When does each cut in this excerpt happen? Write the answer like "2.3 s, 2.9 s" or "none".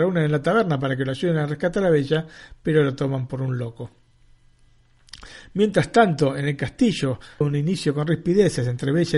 7.4 s